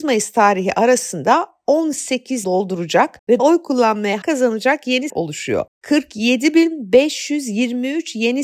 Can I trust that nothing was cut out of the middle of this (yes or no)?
no